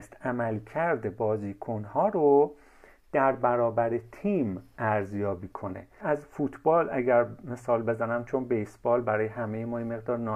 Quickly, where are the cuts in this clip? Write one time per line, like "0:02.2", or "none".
0:06.0